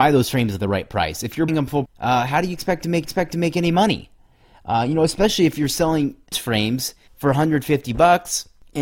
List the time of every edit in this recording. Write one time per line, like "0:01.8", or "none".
0:01.5
0:01.9
0:03.0
0:06.3